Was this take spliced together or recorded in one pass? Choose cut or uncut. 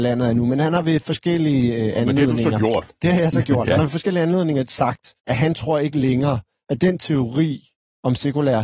cut